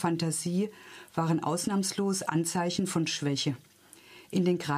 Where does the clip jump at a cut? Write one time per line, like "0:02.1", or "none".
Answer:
none